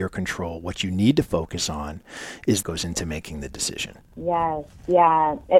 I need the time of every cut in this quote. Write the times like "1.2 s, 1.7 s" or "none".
2.6 s, 4.1 s